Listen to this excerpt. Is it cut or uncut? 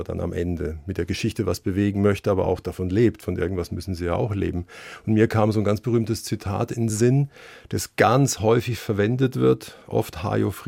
uncut